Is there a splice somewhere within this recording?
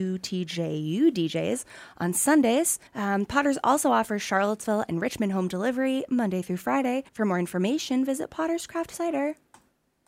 yes; 2 cuts; at 2.9 s, 7.1 s

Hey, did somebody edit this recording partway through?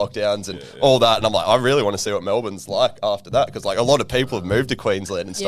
no; 0 cuts

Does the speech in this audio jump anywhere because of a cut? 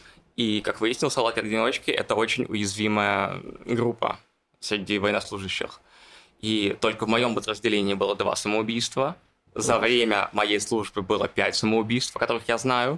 no; 0 cuts

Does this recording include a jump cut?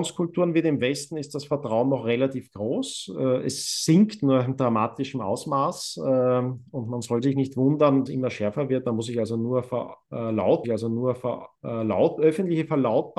yes; 2 cuts; at 8.1 s, 10.6 s

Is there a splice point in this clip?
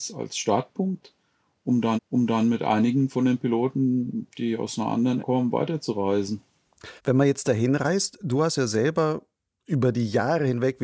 yes; 3 cuts; at 2.0 s, 5.2 s, 7.0 s

